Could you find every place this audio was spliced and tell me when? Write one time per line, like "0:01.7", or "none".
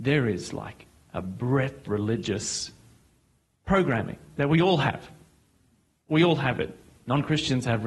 0:01.8